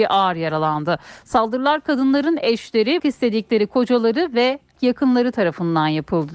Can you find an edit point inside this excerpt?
yes; 3 cuts; at 2.4 s, 3.0 s, 4.8 s

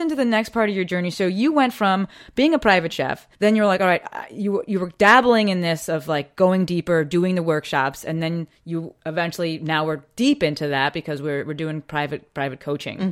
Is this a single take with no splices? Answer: no; 1 cut; at 3.3 s

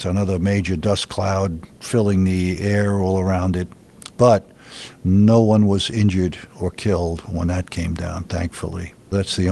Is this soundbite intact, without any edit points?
no; 2 cuts; at 1.7 s, 6.5 s

